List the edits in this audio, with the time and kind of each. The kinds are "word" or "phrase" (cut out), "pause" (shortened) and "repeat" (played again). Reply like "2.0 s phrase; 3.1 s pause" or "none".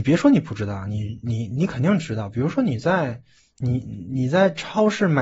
none

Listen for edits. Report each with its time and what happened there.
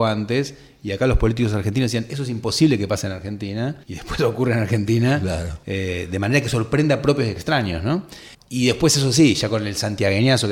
3.8 s pause; 8.3 s pause

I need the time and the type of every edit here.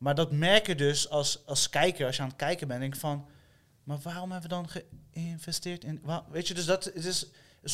none

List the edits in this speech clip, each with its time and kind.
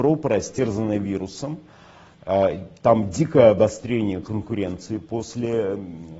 none

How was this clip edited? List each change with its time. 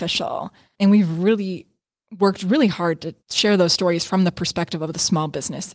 3.2 s pause

